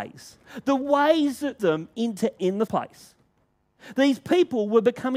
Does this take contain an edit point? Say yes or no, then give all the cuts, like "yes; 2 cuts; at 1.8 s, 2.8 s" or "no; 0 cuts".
yes; 3 cuts; at 1.6 s, 2.4 s, 2.7 s